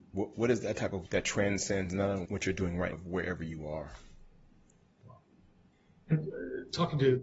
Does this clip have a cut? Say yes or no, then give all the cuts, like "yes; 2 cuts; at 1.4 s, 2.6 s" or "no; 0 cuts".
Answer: yes; 3 cuts; at 1.1 s, 2.3 s, 2.9 s